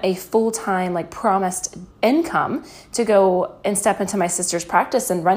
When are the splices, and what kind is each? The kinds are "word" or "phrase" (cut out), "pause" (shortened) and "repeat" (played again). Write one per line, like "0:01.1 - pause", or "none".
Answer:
0:01.9 - pause